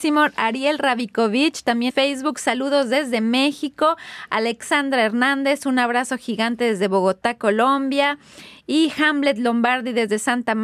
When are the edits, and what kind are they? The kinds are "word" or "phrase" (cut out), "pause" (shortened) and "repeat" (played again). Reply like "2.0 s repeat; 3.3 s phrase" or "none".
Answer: 1.9 s word